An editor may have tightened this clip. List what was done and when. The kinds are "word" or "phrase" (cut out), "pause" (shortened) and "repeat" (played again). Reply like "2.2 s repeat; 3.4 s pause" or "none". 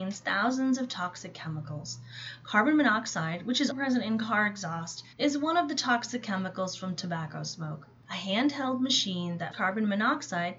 3.7 s word; 5.1 s pause; 9.5 s word